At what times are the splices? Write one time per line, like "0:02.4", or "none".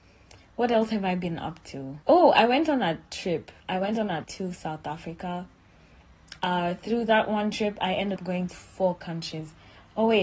0:02.0
0:03.6
0:04.2
0:06.4
0:08.2
0:08.5